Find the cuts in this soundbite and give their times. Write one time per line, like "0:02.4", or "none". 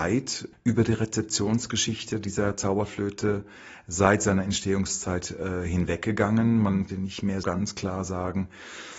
0:06.9
0:07.4